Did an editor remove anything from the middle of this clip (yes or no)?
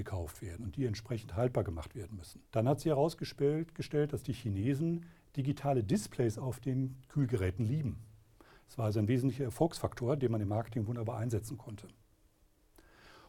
yes